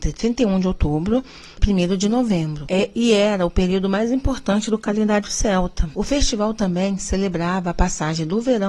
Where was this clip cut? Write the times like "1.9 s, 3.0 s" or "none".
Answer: 1.6 s